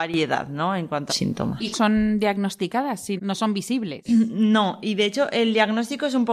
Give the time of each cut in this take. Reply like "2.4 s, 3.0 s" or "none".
1.1 s, 1.7 s, 3.2 s